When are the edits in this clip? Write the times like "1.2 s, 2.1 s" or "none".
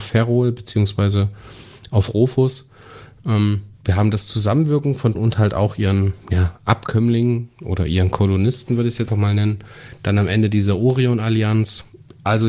3.7 s, 5.1 s, 9.1 s

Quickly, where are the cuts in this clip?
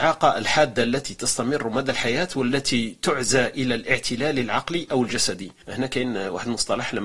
none

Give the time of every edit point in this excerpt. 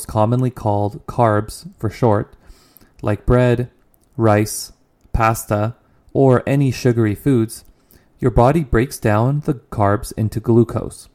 none

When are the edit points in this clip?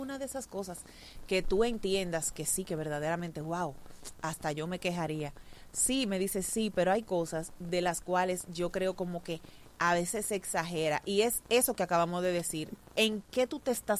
none

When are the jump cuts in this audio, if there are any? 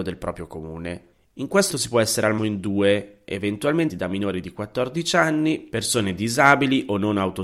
1.1 s, 1.7 s, 2.4 s, 3.9 s

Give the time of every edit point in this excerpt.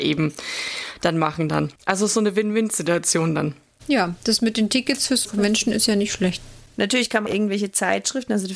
1.8 s, 5.3 s, 7.3 s

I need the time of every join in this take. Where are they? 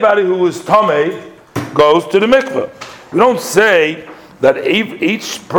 none

